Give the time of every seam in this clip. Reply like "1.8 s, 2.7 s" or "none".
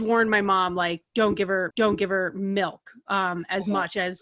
1.7 s